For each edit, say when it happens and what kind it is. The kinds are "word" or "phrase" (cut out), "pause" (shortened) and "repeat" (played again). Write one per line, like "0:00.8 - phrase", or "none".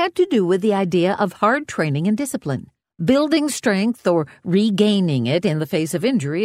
0:02.8 - pause